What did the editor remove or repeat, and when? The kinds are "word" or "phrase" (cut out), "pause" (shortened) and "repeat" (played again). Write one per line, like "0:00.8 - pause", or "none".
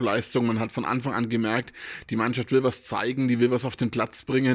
none